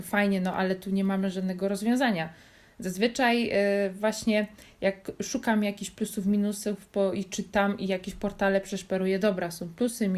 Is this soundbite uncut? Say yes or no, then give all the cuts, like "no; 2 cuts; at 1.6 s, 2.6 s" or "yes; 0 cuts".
yes; 0 cuts